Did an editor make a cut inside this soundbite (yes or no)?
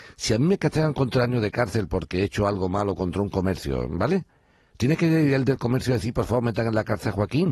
no